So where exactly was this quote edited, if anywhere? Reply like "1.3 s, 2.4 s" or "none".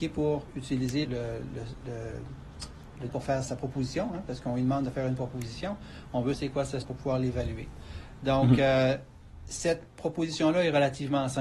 1.0 s, 3.1 s, 3.4 s, 6.3 s, 6.8 s